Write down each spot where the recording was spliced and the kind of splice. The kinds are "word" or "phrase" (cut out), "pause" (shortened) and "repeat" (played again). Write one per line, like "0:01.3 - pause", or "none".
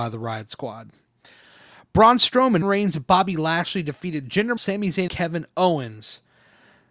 0:02.6 - word
0:04.6 - word
0:05.1 - word